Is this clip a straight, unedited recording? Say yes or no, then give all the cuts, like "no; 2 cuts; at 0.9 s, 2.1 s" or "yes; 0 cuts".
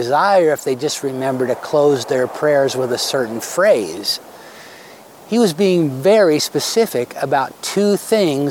yes; 0 cuts